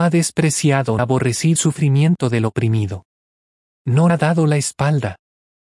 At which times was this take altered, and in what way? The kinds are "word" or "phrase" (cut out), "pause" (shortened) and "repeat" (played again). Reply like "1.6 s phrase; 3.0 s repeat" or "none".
1.0 s word; 1.6 s word; 4.1 s word